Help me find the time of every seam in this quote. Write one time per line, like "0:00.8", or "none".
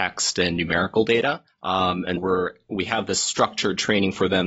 0:01.5
0:02.2